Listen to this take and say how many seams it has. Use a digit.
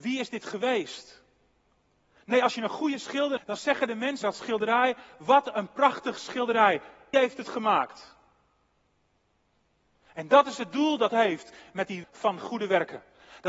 5